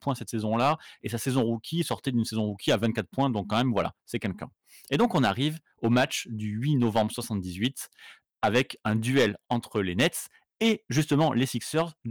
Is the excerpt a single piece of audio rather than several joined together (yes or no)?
yes